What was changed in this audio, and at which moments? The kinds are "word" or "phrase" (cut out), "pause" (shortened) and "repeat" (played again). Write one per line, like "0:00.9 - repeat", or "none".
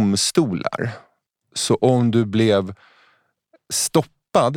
none